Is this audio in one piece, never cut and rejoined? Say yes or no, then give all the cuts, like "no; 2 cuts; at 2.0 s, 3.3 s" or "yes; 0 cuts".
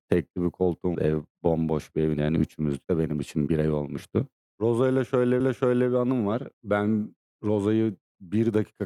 no; 6 cuts; at 0.9 s, 2.2 s, 2.8 s, 3.5 s, 5.4 s, 6.5 s